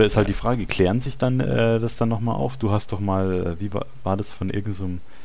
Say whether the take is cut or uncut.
uncut